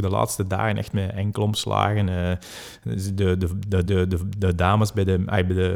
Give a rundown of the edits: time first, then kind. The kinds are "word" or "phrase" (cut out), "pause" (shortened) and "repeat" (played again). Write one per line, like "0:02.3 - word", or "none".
0:00.9 - phrase
0:03.8 - repeat